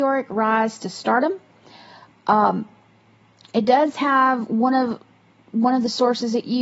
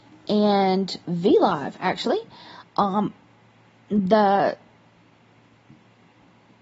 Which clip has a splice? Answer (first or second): first